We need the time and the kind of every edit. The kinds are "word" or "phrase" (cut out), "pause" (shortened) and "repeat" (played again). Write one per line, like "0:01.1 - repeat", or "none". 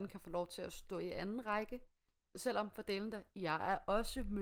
none